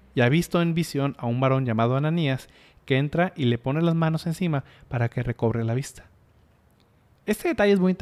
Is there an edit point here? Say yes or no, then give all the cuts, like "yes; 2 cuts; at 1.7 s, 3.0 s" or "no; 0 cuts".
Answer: no; 0 cuts